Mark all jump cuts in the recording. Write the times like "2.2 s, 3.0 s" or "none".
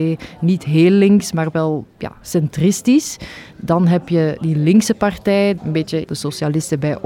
6.0 s